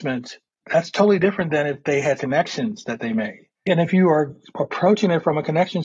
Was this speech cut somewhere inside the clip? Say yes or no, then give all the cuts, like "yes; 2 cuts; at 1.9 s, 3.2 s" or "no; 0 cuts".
yes; 2 cuts; at 2.2 s, 3.6 s